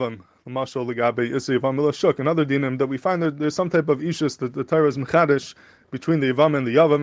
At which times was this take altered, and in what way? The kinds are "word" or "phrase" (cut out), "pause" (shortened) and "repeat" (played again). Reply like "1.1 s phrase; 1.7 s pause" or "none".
none